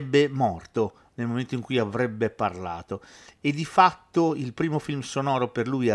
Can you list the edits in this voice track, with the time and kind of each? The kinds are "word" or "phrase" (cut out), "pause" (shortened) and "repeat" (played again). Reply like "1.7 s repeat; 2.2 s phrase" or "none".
none